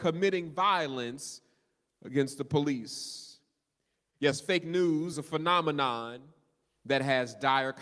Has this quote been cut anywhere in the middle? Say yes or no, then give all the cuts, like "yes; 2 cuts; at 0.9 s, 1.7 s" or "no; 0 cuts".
yes; 1 cut; at 5.1 s